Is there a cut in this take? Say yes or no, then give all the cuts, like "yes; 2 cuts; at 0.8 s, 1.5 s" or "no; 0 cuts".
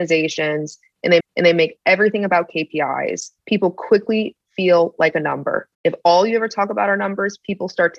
yes; 3 cuts; at 1.2 s, 3.4 s, 5.7 s